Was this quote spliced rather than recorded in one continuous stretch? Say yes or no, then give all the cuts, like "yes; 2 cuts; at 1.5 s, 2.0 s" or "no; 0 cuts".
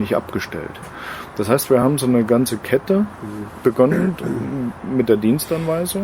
no; 0 cuts